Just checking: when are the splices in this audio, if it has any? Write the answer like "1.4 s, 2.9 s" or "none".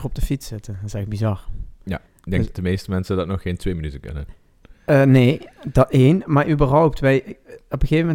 2.1 s